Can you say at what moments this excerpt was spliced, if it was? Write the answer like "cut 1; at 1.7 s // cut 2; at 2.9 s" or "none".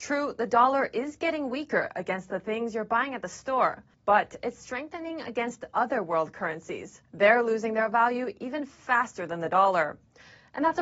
cut 1; at 3.9 s // cut 2; at 7.1 s